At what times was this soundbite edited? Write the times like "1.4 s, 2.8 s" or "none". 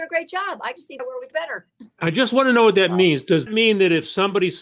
1.0 s, 1.3 s, 1.9 s, 3.5 s

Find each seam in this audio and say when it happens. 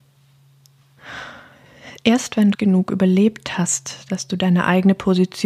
2.5 s

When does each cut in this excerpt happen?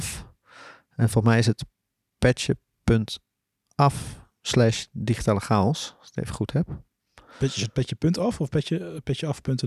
none

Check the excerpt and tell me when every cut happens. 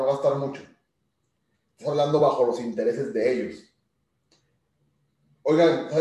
none

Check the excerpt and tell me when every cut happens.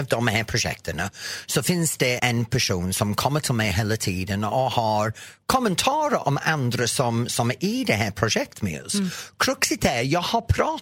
2.2 s

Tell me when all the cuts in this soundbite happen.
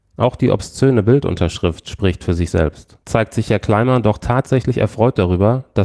3.0 s

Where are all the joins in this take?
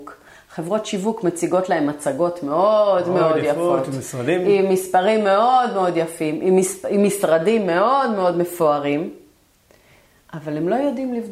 none

